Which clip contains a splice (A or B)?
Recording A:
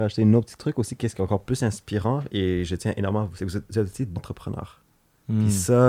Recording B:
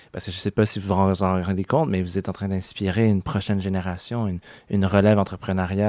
A